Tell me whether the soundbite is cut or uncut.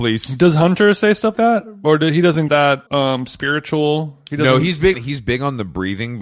cut